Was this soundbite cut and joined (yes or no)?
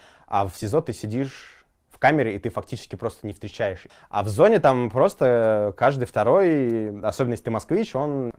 no